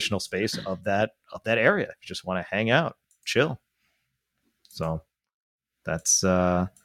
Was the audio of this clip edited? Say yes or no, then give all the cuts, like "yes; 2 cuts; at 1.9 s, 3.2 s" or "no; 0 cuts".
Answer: no; 0 cuts